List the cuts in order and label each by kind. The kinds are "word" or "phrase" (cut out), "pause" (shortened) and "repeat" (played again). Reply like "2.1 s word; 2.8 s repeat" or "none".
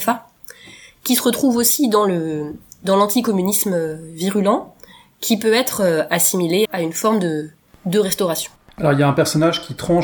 6.6 s word